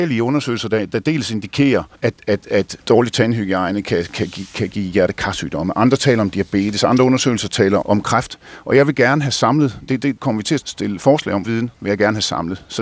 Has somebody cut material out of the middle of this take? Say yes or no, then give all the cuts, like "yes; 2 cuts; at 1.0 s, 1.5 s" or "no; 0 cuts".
yes; 6 cuts; at 1.9 s, 2.8 s, 7.8 s, 10.2 s, 10.6 s, 11.4 s